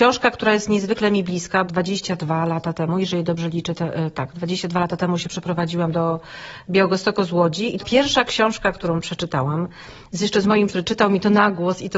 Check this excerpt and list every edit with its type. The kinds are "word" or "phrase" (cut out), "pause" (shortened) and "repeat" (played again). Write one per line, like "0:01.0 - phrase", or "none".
0:01.7 - word
0:07.8 - word
0:10.7 - word